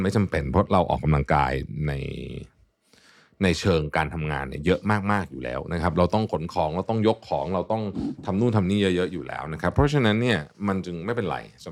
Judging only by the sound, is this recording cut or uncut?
uncut